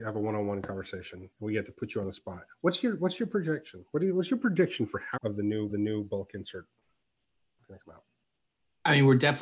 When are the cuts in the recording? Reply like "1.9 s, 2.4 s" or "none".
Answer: 1.3 s, 5.2 s, 5.7 s